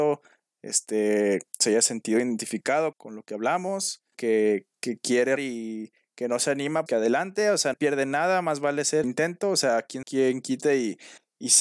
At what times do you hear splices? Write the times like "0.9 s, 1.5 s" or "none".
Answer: 1.5 s, 2.9 s, 4.1 s, 4.7 s, 5.4 s, 6.9 s, 7.7 s, 9.0 s, 10.0 s